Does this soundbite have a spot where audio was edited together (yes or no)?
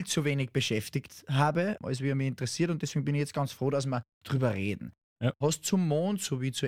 no